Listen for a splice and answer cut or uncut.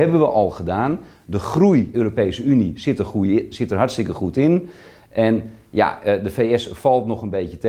cut